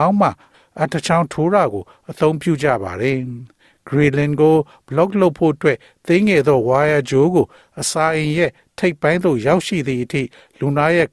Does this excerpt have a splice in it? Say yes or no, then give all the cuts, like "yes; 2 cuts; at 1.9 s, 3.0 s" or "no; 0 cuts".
no; 0 cuts